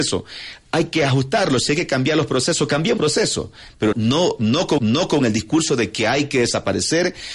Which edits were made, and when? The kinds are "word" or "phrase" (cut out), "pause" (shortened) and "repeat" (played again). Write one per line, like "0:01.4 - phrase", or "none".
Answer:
0:03.0 - word
0:03.9 - word
0:04.8 - repeat